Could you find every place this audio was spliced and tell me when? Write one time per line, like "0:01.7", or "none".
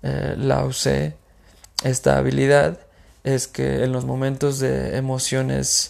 none